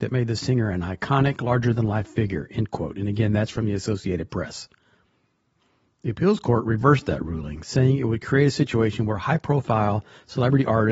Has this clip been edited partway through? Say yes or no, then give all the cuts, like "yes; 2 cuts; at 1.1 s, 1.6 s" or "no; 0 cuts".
no; 0 cuts